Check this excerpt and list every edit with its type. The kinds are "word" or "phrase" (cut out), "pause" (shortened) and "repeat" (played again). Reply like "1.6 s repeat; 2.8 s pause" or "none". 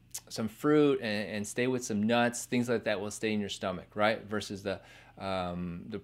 none